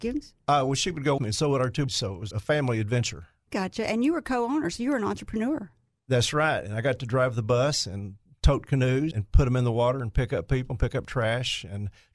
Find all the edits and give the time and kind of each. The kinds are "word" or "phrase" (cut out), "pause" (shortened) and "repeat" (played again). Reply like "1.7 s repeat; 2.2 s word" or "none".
1.2 s word; 1.9 s word; 2.3 s word; 3.5 s word; 9.1 s word